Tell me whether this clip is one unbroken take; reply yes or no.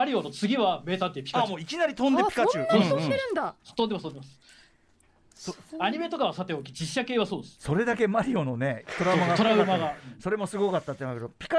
yes